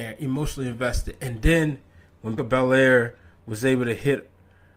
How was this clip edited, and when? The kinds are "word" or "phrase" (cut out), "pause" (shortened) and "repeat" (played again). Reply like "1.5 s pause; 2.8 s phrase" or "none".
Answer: 2.4 s word